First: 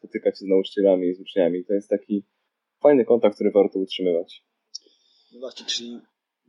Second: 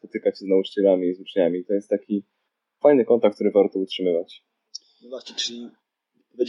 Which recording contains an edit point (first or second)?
second